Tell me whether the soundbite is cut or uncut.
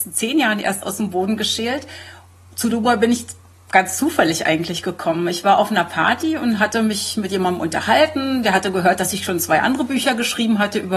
uncut